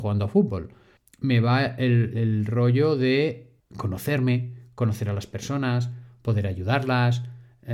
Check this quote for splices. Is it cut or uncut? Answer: cut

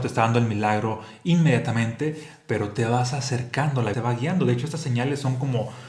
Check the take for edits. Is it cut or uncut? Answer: cut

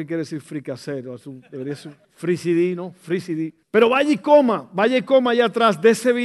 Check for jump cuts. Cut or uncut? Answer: cut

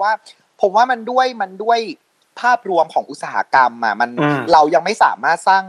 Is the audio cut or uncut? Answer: uncut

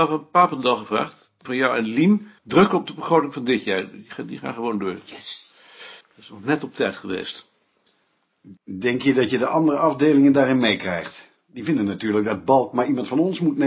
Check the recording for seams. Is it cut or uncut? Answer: cut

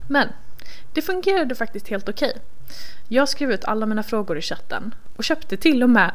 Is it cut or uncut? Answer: uncut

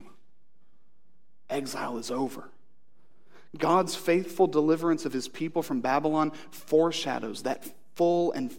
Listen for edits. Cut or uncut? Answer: uncut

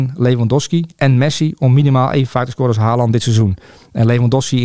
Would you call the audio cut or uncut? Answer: uncut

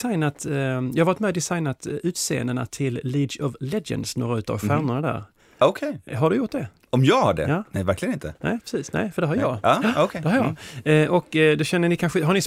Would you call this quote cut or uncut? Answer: uncut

